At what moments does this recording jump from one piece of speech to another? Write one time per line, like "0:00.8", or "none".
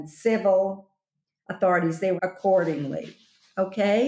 0:02.2